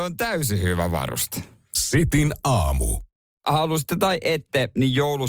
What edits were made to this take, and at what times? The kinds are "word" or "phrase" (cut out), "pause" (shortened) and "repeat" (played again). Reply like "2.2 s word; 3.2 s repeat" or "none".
3.1 s pause